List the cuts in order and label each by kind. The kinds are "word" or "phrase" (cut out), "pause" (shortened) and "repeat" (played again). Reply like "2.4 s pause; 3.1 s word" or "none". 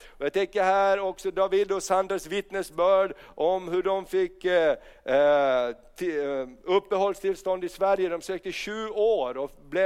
none